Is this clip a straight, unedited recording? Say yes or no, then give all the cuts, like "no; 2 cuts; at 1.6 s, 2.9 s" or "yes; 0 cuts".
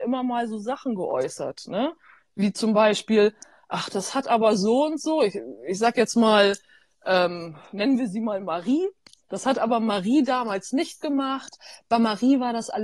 yes; 0 cuts